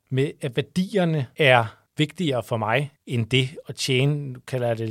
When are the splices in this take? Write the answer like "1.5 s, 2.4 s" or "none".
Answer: none